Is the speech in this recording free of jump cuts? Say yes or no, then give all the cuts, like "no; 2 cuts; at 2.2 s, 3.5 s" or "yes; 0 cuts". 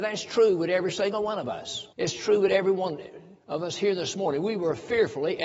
no; 2 cuts; at 1.9 s, 3.4 s